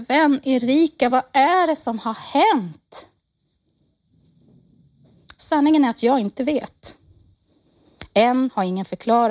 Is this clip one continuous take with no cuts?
yes; 0 cuts

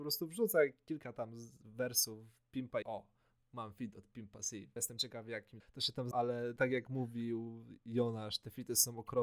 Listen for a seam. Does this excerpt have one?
yes; 6 cuts; at 2.8 s, 3.4 s, 4.8 s, 5.6 s, 6.1 s, 6.6 s

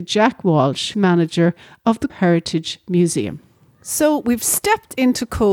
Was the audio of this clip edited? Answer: yes; 2 cuts; at 0.9 s, 2.1 s

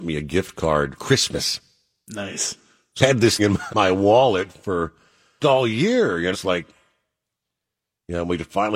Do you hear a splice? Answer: yes; 6 cuts; at 1.0 s, 3.0 s, 3.4 s, 3.7 s, 5.4 s, 6.3 s

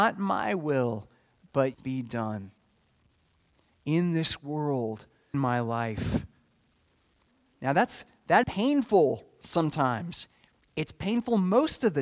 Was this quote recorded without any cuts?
no; 3 cuts; at 1.7 s, 5.3 s, 8.4 s

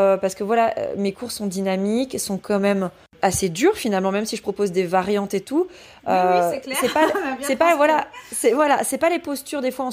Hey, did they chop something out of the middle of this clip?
yes; 1 cut; at 3.2 s

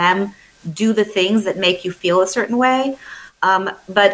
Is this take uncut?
yes; 0 cuts

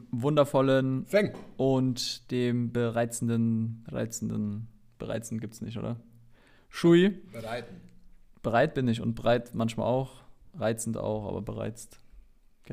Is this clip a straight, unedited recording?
yes; 0 cuts

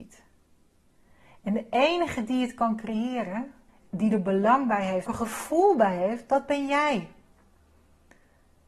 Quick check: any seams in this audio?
yes; 2 cuts; at 3.7 s, 5.1 s

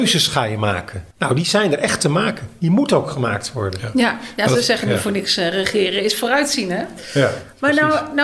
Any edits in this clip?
yes; 1 cut; at 1.1 s

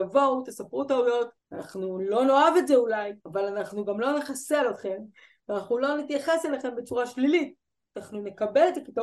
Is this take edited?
yes; 2 cuts; at 1.4 s, 3.2 s

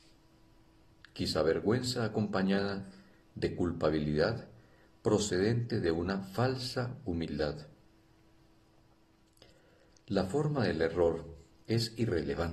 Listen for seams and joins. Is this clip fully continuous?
yes; 0 cuts

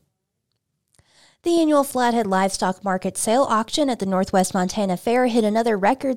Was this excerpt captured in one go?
yes; 0 cuts

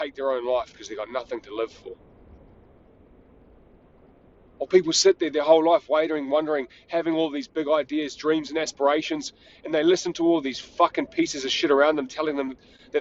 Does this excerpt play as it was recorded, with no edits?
yes; 0 cuts

